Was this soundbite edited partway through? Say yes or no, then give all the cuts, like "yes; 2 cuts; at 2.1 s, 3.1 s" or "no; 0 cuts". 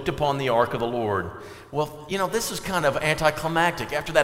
no; 0 cuts